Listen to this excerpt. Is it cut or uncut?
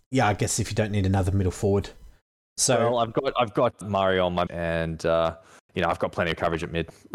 cut